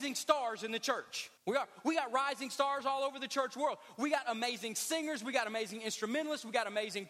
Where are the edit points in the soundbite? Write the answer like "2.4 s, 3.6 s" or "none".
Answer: 1.4 s